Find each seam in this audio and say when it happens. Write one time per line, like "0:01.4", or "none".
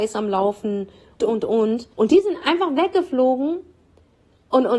0:01.2
0:01.9